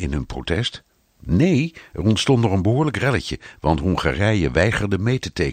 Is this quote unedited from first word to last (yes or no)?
yes